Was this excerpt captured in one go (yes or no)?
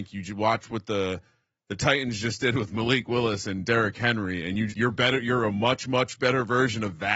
no